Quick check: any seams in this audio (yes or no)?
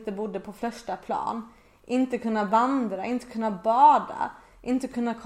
no